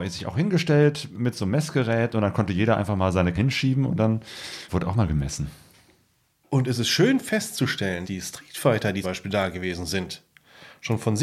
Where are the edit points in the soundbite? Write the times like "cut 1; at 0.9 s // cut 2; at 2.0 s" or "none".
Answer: cut 1; at 3.3 s // cut 2; at 4.7 s // cut 3; at 8.0 s // cut 4; at 9.0 s